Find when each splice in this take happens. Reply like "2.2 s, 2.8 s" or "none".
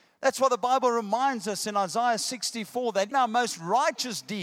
3.1 s